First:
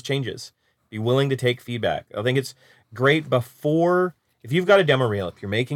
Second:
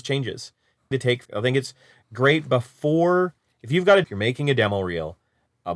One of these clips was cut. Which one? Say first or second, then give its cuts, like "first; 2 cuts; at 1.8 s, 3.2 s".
second; 3 cuts; at 0.9 s, 1.2 s, 4.0 s